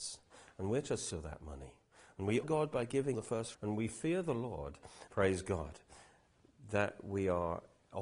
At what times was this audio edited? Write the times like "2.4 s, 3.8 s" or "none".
1.1 s, 2.4 s, 3.1 s, 3.5 s, 5.1 s